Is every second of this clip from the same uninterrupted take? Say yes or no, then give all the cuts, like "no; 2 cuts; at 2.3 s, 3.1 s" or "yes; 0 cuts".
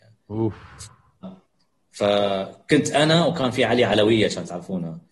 yes; 0 cuts